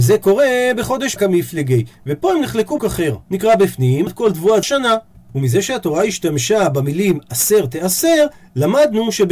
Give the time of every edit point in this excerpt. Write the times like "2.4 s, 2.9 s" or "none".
1.2 s, 2.8 s, 3.2 s, 4.1 s, 4.6 s